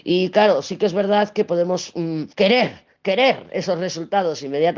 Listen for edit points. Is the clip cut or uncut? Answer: cut